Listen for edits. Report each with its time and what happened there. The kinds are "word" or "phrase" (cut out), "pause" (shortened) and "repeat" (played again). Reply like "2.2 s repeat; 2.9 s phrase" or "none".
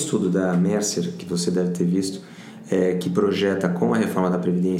none